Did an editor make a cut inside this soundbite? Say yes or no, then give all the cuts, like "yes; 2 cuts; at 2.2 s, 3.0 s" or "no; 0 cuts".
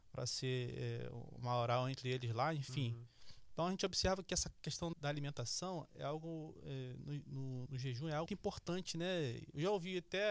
yes; 3 cuts; at 4.9 s, 7.7 s, 8.3 s